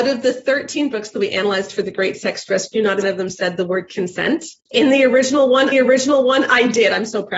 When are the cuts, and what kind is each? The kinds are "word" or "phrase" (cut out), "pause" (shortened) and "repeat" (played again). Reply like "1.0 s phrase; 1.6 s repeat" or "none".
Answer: 3.0 s phrase; 4.6 s pause; 5.7 s repeat